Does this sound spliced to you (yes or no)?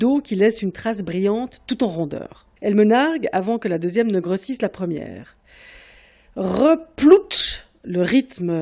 no